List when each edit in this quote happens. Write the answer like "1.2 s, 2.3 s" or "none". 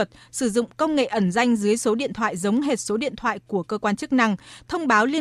none